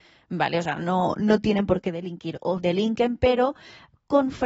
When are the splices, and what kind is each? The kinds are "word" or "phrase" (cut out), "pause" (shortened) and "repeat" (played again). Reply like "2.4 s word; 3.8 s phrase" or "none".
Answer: 2.6 s word